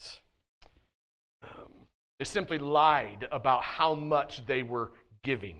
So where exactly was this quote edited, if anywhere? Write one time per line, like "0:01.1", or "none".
none